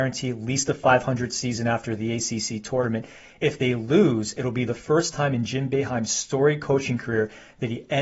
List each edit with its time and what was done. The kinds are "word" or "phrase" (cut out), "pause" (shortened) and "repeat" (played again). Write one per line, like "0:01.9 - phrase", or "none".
none